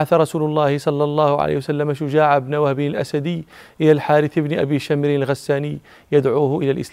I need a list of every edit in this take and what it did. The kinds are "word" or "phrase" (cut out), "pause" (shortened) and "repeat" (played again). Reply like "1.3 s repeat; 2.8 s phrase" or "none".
none